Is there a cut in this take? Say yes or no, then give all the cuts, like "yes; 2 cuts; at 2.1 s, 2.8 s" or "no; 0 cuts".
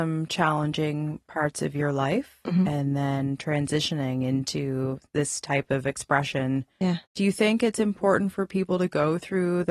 yes; 1 cut; at 7.0 s